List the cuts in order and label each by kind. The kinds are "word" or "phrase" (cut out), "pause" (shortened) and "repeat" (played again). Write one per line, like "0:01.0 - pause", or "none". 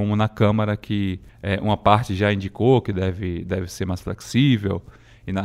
0:01.3 - pause